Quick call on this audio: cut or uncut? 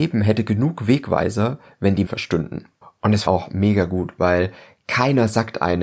cut